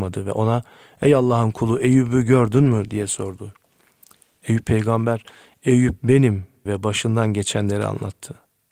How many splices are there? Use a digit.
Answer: 1